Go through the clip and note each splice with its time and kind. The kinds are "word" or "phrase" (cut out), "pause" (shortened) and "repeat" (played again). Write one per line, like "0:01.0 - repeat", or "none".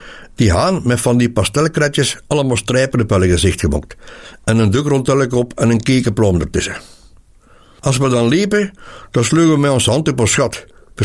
none